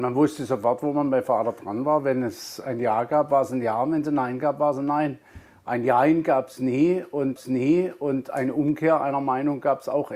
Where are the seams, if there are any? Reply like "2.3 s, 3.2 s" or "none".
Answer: 7.4 s